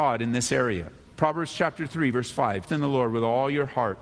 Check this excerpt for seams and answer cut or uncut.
cut